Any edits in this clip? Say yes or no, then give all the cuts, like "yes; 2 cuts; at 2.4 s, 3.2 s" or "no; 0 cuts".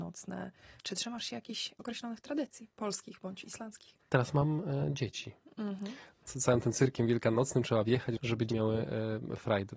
yes; 2 cuts; at 6.2 s, 8.5 s